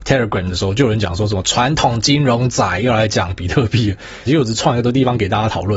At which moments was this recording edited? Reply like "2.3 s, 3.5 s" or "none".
4.3 s